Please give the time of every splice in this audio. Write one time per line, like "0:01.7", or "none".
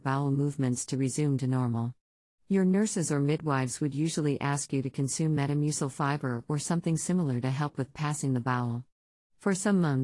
none